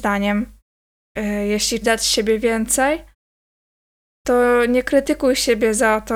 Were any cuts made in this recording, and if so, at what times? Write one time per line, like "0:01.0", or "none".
0:01.8